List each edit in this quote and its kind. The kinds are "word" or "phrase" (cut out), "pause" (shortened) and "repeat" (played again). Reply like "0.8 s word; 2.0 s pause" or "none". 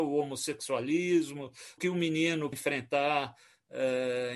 1.8 s word; 2.5 s word